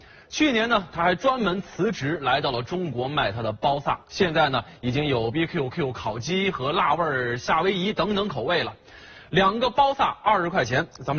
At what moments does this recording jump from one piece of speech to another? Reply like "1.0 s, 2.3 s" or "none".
4.0 s, 5.3 s, 5.7 s

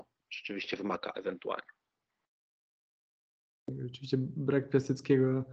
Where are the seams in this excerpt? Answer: none

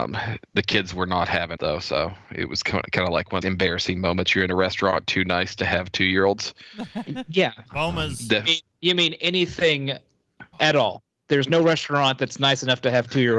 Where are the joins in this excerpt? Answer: 1.6 s, 3.4 s, 7.7 s, 10.5 s

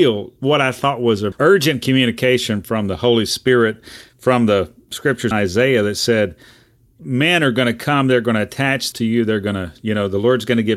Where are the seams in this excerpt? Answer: 1.3 s, 5.3 s, 8.9 s

